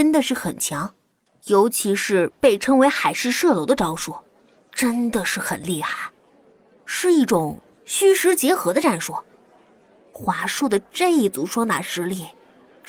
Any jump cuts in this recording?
no; 0 cuts

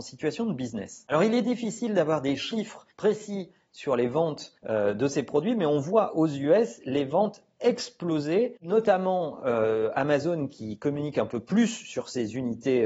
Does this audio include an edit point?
yes; 2 cuts; at 2.9 s, 4.6 s

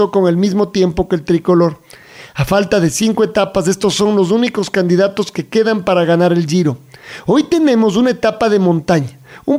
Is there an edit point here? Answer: no; 0 cuts

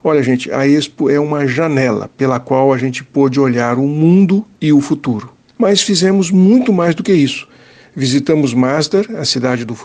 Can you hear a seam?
no; 0 cuts

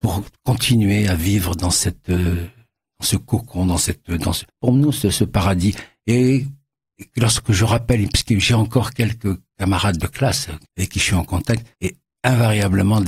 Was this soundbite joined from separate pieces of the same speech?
yes; 3 cuts; at 4.5 s, 10.7 s, 11.7 s

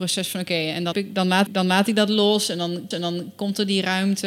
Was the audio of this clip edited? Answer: yes; 3 cuts; at 0.9 s, 1.5 s, 2.9 s

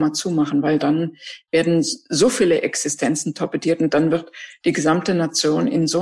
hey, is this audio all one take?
yes; 0 cuts

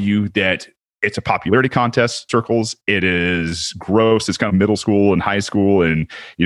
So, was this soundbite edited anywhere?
yes; 2 cuts; at 2.3 s, 4.5 s

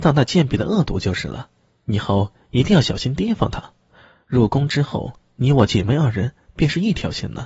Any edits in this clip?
no; 0 cuts

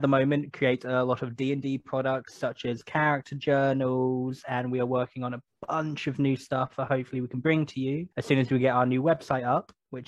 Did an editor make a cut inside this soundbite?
yes; 1 cut; at 8.1 s

